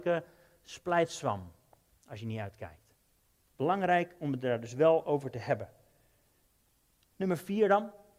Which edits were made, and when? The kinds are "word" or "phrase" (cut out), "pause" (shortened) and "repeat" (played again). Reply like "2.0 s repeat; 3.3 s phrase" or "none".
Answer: none